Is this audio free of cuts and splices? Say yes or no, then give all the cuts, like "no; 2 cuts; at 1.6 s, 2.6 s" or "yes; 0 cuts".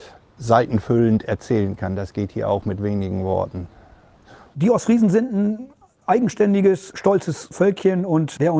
yes; 0 cuts